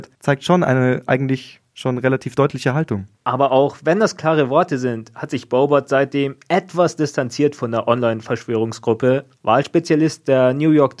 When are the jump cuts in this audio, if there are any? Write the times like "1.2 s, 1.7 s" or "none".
3.1 s, 9.3 s